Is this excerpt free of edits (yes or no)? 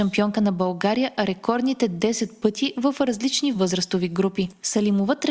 yes